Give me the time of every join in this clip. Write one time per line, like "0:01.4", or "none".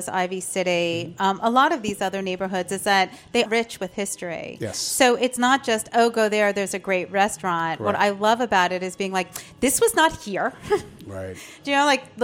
0:03.5